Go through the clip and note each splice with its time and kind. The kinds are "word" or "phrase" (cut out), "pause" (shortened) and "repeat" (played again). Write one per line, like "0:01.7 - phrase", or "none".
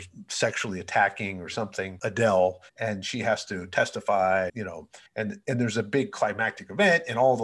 0:02.7 - pause
0:04.5 - word
0:05.1 - pause